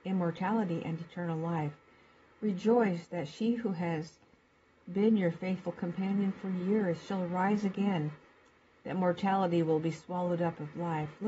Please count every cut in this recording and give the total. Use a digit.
0